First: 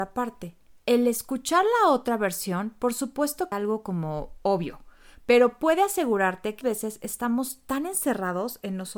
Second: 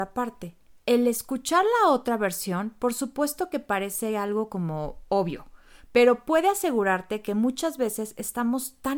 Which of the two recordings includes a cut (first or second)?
first